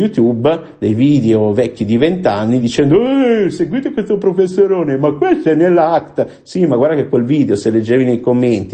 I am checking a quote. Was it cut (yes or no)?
no